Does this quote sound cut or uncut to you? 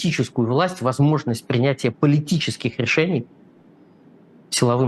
uncut